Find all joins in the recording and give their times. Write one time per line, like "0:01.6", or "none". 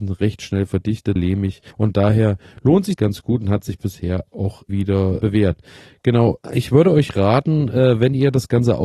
0:01.2
0:01.7
0:03.0
0:04.7
0:05.2
0:06.4